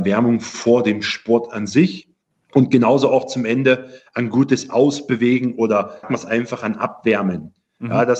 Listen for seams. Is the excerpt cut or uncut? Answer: cut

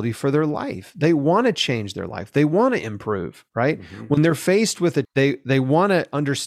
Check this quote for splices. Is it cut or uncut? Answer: cut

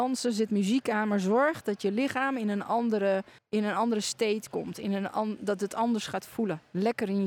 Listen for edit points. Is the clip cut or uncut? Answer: cut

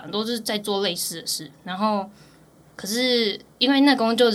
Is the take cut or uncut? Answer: uncut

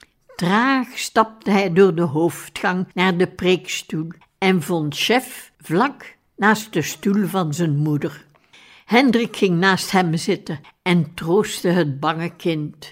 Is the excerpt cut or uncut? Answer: cut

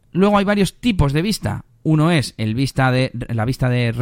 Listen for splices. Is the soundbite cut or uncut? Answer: uncut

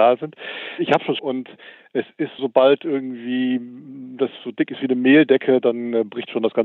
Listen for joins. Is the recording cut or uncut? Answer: cut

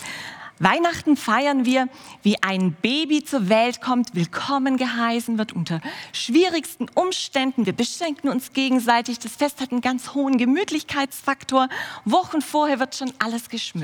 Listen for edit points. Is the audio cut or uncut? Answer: uncut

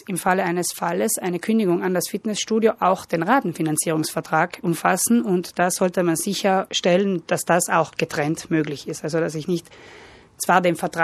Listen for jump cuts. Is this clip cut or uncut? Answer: uncut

